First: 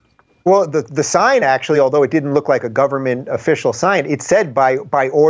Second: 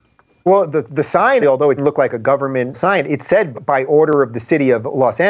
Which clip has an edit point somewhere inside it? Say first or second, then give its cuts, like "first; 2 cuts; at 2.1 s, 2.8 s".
second; 4 cuts; at 1.4 s, 1.8 s, 2.7 s, 3.5 s